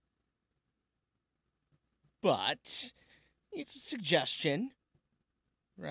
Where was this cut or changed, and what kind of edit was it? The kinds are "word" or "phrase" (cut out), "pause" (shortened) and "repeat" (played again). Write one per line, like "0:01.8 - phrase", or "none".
0:03.6 - word